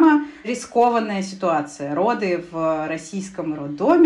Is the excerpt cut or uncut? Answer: uncut